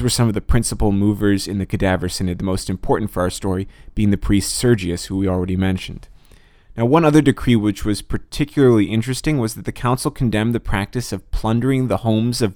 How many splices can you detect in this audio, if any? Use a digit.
0